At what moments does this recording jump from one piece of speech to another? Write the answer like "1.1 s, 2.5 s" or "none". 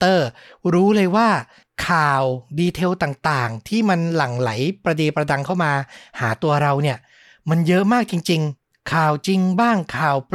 none